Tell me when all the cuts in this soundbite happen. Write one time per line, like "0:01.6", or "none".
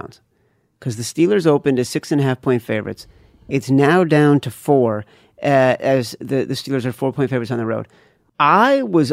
none